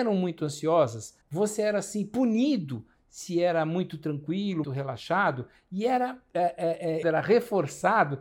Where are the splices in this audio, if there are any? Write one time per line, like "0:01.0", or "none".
0:01.2
0:04.6
0:07.0

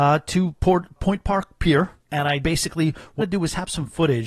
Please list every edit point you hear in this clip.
0:01.0
0:02.0
0:02.4
0:03.2

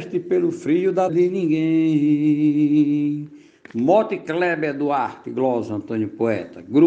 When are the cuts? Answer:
0:01.1

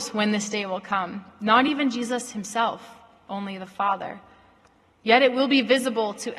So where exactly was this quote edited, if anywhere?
none

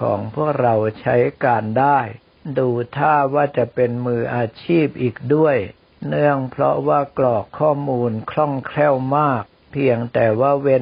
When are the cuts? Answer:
none

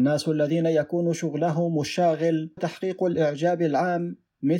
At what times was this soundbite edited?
0:02.6

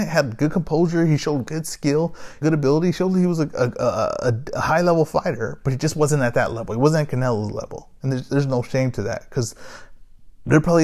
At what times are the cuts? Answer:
0:02.4

